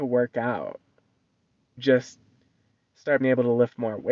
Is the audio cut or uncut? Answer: cut